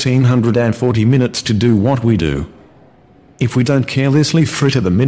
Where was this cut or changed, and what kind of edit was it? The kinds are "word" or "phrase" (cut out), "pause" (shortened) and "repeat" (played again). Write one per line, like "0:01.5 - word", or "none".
none